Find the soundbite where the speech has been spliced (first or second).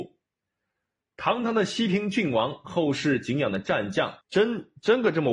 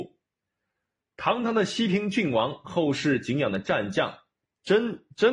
first